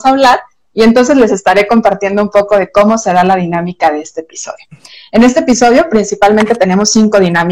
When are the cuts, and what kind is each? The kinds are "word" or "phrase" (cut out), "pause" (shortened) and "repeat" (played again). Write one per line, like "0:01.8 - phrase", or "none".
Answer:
none